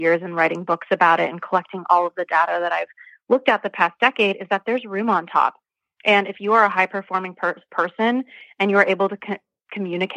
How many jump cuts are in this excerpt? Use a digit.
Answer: 0